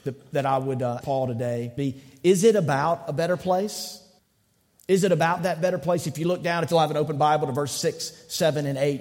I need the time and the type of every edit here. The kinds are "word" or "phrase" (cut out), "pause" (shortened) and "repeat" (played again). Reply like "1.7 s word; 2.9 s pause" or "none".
1.0 s word; 1.8 s word; 4.2 s pause; 6.7 s word

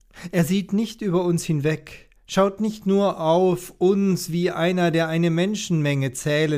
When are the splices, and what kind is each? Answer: none

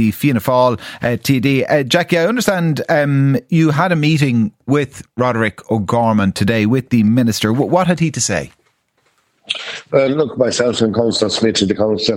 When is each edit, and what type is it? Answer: none

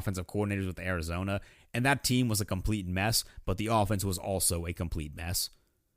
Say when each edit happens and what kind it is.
none

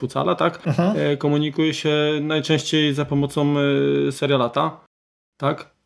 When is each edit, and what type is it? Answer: none

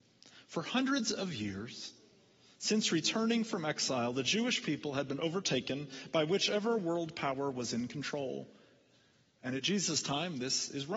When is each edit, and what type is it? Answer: none

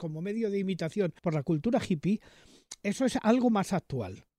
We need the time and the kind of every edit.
1.2 s pause

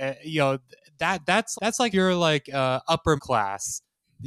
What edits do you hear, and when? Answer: 1.5 s word; 1.9 s word; 3.2 s word

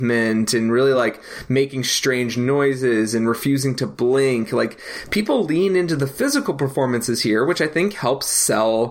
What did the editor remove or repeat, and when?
none

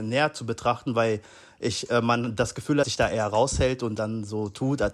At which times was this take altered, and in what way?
2.8 s phrase

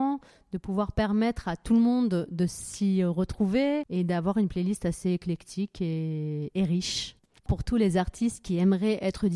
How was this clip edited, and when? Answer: none

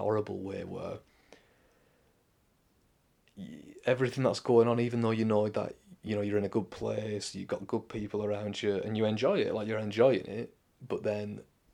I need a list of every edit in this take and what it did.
none

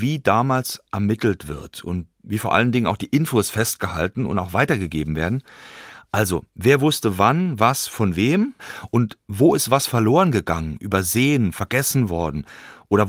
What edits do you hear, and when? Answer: 6.5 s pause

